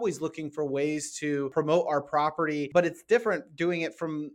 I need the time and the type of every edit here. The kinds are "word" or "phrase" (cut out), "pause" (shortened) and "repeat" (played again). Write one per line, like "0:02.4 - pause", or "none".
none

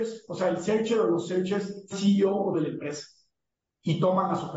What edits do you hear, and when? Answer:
0:01.9 - word
0:02.5 - word

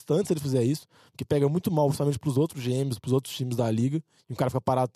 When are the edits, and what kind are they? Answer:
none

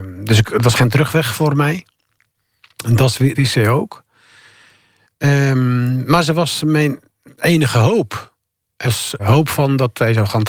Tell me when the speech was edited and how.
0:03.3 - word
0:08.8 - word
0:09.2 - word

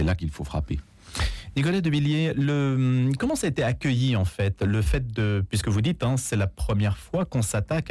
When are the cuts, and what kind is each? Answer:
none

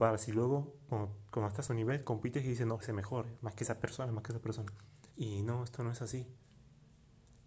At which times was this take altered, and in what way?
0:01.7 - word
0:02.8 - phrase
0:05.1 - pause

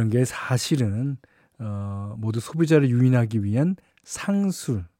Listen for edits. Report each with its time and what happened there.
none

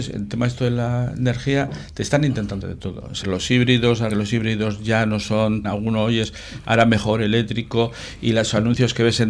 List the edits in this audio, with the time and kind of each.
0:02.6 - word
0:03.2 - word
0:04.1 - word
0:05.6 - word

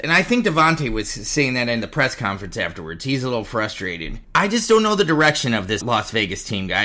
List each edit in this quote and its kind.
0:04.2 - pause
0:05.8 - word

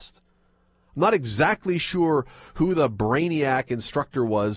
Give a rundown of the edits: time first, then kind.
none

